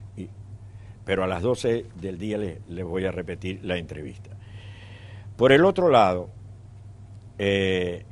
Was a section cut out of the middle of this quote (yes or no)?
yes